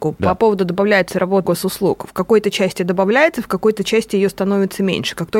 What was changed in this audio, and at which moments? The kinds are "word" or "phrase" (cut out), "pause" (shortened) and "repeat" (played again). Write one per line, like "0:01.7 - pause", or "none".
0:01.4 - word